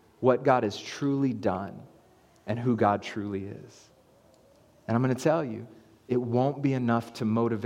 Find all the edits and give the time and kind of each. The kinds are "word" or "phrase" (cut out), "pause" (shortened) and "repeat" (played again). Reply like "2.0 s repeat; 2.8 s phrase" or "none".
none